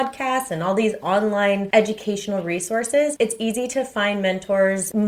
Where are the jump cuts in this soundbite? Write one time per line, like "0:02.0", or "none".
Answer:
none